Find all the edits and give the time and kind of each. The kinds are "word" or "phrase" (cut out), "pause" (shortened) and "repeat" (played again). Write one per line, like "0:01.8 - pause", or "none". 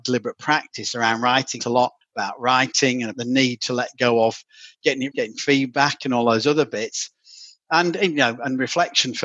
0:01.6 - phrase
0:02.0 - pause
0:03.1 - word
0:05.1 - phrase